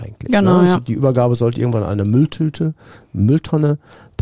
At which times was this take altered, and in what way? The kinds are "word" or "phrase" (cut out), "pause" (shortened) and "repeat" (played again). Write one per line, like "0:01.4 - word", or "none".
none